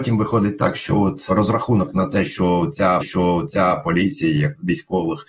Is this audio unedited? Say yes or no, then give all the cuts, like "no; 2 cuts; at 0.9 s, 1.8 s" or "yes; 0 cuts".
no; 1 cut; at 3.0 s